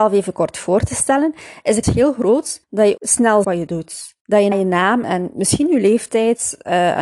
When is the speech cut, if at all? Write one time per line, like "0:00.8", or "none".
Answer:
0:01.8
0:02.6
0:03.0
0:03.4
0:04.2
0:04.5
0:05.0